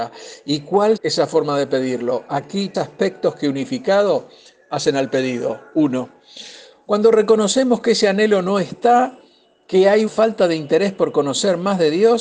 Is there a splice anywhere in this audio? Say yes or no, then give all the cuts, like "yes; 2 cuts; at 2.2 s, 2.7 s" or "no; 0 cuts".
yes; 3 cuts; at 1.0 s, 2.7 s, 10.1 s